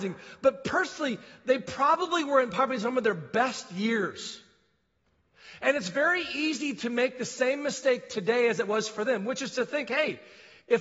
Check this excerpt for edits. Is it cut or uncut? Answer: uncut